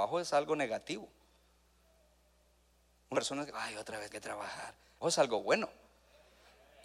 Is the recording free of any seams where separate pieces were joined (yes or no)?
no